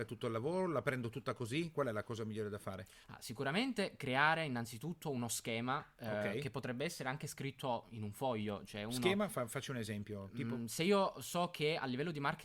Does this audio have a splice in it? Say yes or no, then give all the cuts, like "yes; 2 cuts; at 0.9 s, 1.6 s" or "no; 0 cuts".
yes; 1 cut; at 3.0 s